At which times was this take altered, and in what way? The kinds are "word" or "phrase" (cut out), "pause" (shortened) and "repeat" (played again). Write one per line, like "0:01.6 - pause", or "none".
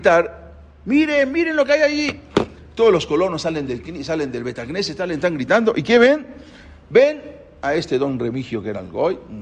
none